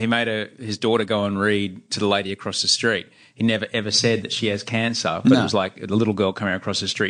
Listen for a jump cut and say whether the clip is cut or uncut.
uncut